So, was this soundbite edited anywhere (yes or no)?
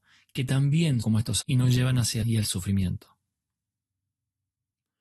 yes